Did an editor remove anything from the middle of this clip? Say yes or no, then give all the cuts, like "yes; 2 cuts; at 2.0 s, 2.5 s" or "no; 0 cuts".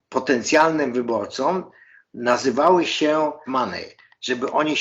yes; 1 cut; at 3.5 s